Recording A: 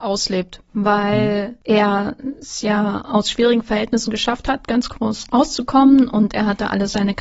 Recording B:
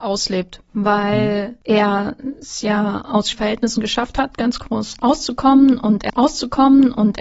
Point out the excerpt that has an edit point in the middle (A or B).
B